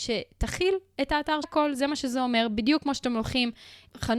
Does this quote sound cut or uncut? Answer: cut